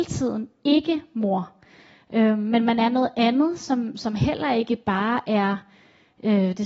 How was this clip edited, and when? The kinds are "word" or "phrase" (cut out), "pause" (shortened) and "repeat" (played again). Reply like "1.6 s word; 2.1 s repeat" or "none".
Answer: none